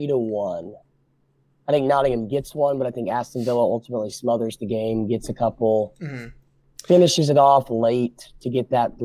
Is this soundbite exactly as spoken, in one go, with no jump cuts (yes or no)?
yes